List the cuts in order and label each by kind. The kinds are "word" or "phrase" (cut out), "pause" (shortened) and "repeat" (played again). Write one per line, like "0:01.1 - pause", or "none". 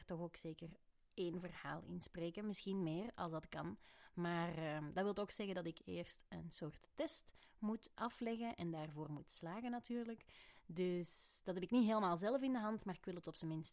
none